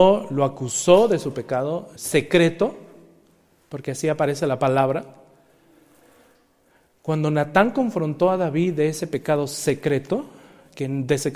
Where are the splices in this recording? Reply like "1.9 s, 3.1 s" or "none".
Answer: 2.0 s